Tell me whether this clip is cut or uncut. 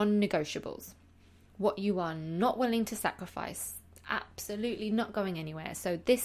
uncut